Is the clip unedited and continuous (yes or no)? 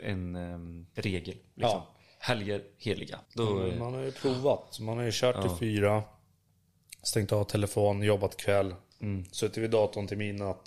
no